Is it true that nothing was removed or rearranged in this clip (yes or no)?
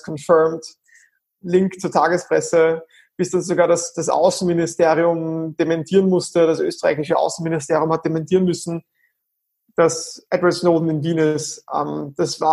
yes